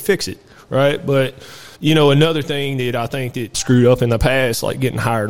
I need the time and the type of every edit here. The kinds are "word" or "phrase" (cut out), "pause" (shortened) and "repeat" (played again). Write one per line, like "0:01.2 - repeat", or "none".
0:01.7 - pause
0:03.5 - word